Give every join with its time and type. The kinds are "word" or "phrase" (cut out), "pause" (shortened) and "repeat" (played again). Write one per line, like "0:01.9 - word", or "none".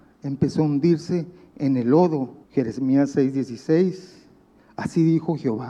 0:02.4 - pause